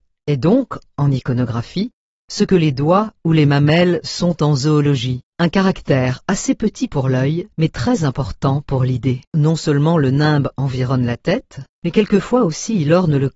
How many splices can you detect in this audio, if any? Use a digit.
4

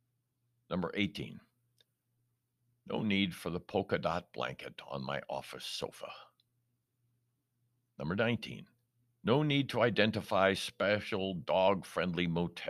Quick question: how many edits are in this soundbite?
1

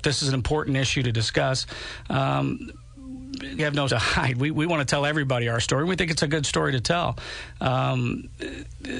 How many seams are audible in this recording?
2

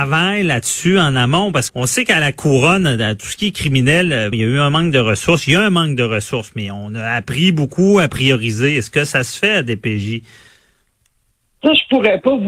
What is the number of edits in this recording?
2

